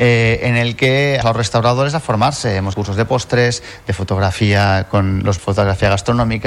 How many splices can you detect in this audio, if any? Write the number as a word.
three